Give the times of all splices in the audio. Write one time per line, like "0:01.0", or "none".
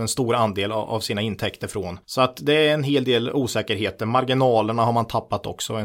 0:02.0